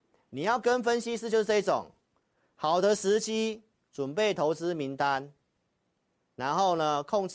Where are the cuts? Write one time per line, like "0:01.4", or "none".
none

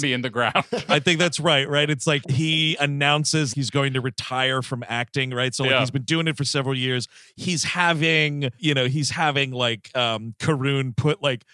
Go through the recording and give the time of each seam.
0:02.2
0:03.5
0:08.6

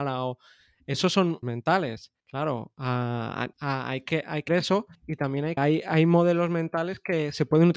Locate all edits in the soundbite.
0:01.4
0:02.2
0:03.5
0:04.5
0:04.9
0:05.6

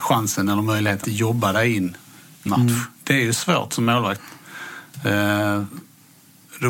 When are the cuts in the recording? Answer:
0:01.0
0:02.5
0:02.9

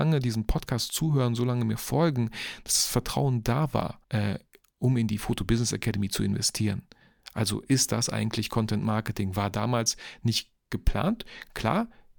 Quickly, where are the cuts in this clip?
0:04.0

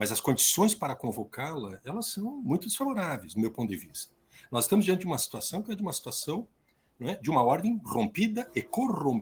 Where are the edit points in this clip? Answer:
none

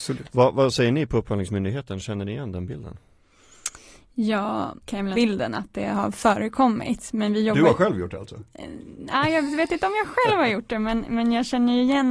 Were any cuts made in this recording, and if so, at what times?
0:04.8
0:05.1

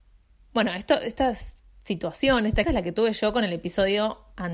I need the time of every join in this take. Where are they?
0:02.6

